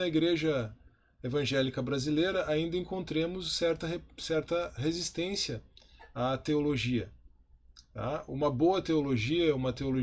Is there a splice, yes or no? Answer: no